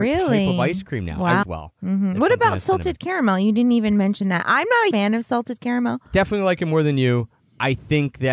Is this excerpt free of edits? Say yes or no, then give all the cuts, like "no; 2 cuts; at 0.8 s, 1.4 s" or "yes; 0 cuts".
no; 2 cuts; at 1.4 s, 4.9 s